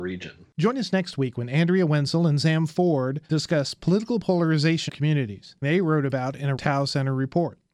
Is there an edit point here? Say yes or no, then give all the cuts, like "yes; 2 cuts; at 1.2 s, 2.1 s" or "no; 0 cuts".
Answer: yes; 4 cuts; at 3.2 s, 4.9 s, 5.6 s, 6.6 s